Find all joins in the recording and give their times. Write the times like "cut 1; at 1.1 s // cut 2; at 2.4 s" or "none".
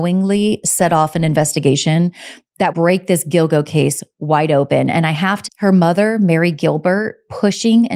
cut 1; at 2.7 s // cut 2; at 5.5 s